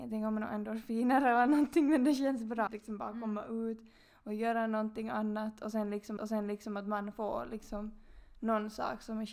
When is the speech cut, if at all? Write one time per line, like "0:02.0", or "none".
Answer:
0:02.7
0:06.2